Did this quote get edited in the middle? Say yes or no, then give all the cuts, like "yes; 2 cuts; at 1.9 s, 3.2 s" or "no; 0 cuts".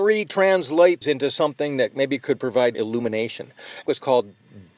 yes; 3 cuts; at 1.0 s, 2.7 s, 3.9 s